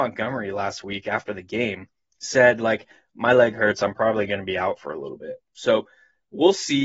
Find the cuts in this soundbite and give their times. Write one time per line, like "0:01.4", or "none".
none